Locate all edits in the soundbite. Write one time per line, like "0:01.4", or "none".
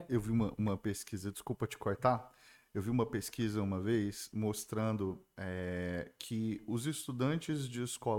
none

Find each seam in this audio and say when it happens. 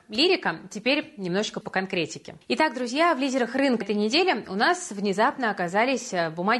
0:01.6
0:02.4
0:03.8

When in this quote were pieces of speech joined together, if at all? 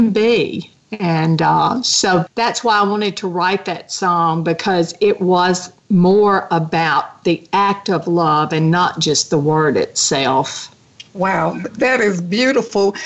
0:02.3
0:05.0

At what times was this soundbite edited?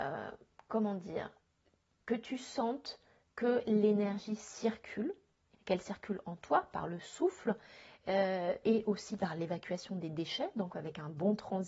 0:05.5

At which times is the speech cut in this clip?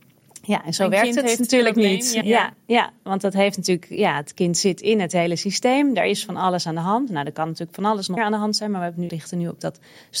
0:02.2
0:08.2
0:09.1

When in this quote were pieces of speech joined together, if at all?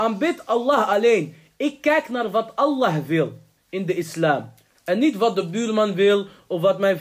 none

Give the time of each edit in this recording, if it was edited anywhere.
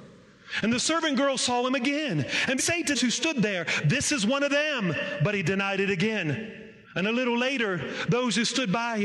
0:02.6
0:02.9
0:06.8

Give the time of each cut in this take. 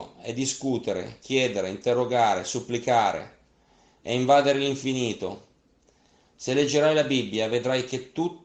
none

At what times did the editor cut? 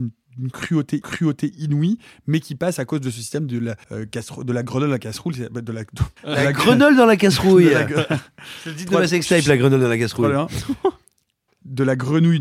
0:01.0
0:03.8
0:06.2

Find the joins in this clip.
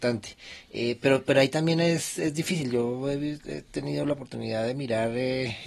none

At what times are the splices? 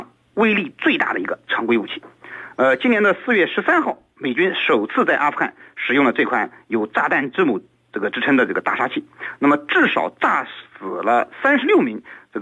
0:07.7

